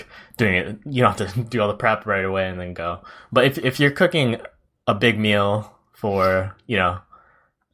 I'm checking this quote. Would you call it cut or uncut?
uncut